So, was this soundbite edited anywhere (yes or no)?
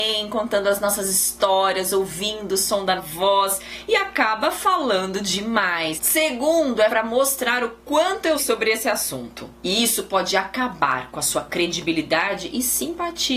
yes